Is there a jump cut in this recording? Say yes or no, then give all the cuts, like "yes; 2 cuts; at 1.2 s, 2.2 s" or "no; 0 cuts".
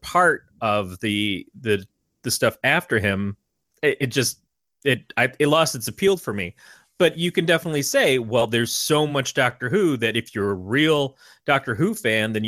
no; 0 cuts